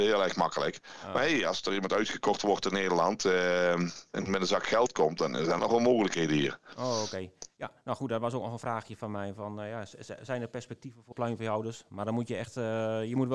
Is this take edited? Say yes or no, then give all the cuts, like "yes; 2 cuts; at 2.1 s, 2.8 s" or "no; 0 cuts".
yes; 2 cuts; at 5.6 s, 11.1 s